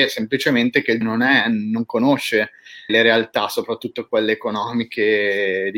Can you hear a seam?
yes; 2 cuts; at 1.0 s, 2.9 s

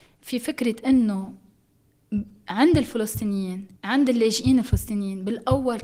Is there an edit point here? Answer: yes; 1 cut; at 3.8 s

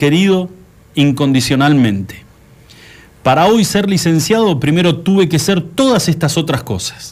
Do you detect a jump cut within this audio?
no; 0 cuts

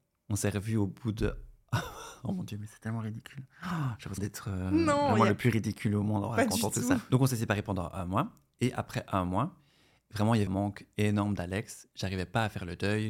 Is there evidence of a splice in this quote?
yes; 2 cuts; at 4.2 s, 10.5 s

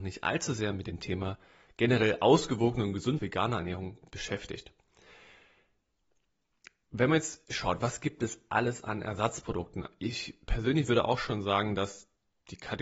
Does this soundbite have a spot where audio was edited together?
yes; 1 cut; at 3.2 s

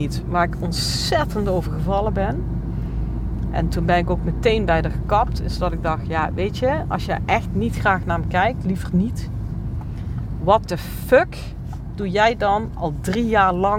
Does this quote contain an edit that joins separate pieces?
no; 0 cuts

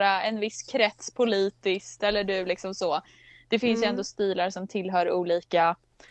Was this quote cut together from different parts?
no; 0 cuts

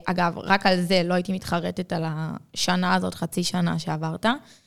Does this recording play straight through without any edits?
yes; 0 cuts

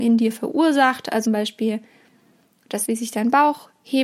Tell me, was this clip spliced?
yes; 2 cuts; at 1.3 s, 2.9 s

